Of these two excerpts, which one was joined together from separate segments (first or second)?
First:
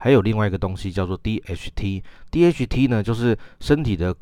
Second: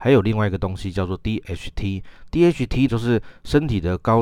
second